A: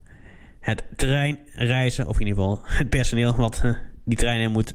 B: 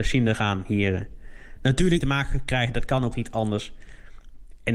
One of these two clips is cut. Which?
B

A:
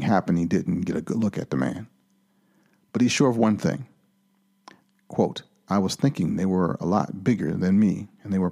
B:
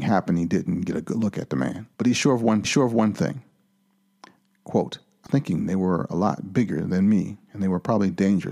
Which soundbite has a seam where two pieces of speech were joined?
B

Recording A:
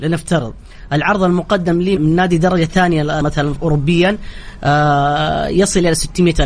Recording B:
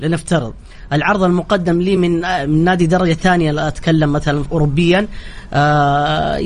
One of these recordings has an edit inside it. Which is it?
A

